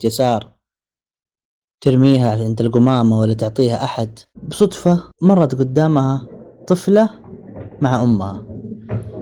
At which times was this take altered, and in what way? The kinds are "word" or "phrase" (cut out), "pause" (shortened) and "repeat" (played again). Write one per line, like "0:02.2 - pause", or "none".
0:05.1 - pause